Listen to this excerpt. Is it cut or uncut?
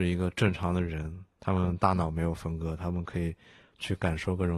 uncut